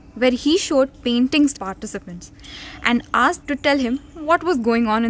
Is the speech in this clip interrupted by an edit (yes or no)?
yes